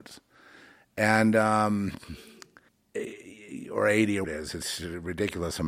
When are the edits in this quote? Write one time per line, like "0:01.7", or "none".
0:02.7
0:04.2